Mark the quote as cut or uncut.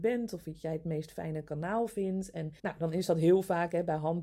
cut